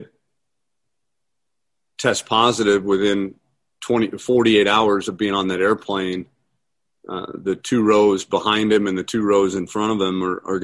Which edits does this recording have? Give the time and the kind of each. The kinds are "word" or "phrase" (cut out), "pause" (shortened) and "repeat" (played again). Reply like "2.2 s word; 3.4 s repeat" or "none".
none